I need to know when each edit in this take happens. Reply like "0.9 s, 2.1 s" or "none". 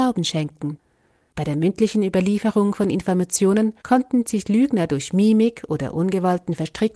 3.8 s